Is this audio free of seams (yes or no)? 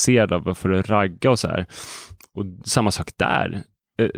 yes